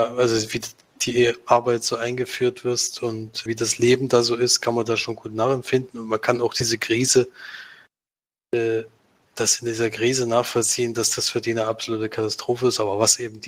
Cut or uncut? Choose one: cut